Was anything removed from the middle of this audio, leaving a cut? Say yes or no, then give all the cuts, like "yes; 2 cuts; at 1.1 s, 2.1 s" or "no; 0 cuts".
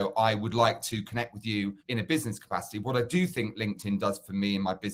yes; 1 cut; at 1.8 s